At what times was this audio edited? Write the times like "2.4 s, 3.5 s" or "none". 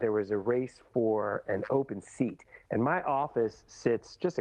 none